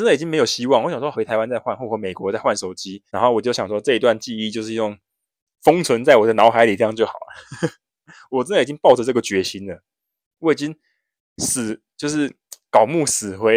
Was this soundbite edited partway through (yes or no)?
yes